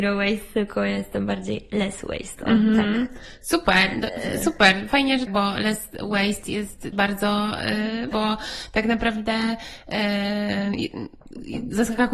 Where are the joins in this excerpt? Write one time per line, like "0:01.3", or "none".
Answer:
0:05.3
0:06.9
0:08.1